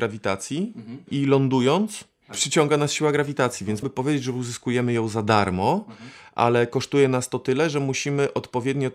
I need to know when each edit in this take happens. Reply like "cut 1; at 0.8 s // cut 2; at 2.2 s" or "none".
cut 1; at 3.8 s